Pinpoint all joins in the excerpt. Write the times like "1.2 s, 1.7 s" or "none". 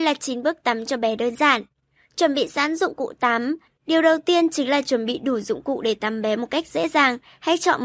none